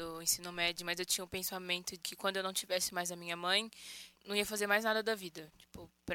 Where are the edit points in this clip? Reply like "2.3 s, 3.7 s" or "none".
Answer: 2.0 s, 4.1 s